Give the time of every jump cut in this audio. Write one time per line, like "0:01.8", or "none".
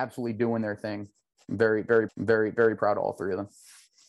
0:02.1